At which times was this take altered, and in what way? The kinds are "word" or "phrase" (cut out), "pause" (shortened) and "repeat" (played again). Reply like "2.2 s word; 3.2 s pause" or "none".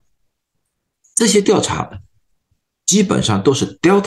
none